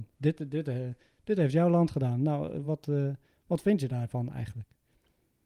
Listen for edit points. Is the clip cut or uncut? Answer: uncut